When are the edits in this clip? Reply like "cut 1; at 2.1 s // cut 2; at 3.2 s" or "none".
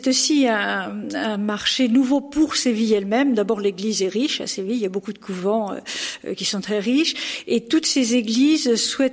none